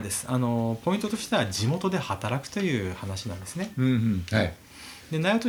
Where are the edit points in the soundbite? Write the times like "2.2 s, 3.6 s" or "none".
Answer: none